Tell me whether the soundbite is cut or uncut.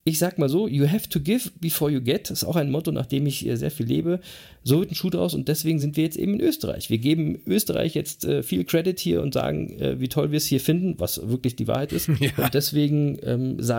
uncut